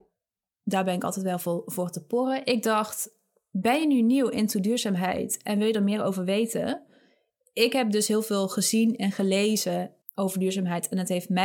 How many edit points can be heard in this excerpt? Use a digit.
1